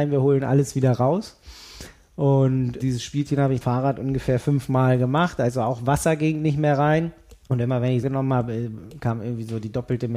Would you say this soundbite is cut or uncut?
cut